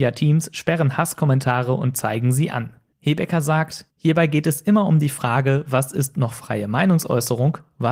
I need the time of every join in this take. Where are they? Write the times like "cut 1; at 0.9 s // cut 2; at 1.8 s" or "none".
cut 1; at 2.9 s // cut 2; at 3.9 s